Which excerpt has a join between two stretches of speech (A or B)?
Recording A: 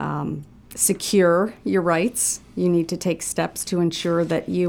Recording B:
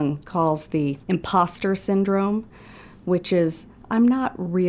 B